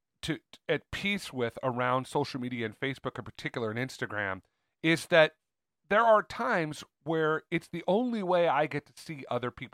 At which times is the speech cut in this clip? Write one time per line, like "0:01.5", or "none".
none